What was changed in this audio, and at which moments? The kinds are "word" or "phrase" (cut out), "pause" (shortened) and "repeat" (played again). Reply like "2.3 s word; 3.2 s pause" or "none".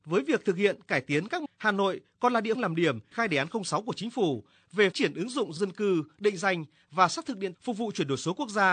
1.5 s word; 2.5 s word; 3.1 s word; 4.9 s word; 5.6 s word; 7.5 s word